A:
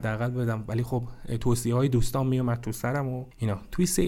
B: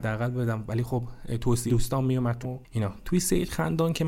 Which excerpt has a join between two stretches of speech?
B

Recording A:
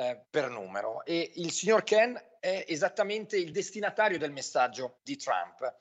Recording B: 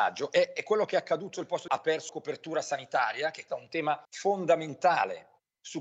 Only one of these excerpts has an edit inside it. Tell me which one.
B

